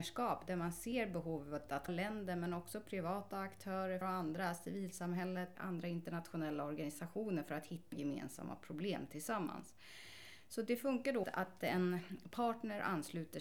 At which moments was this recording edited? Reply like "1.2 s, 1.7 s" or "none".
1.9 s, 4.0 s, 5.6 s, 7.9 s, 11.2 s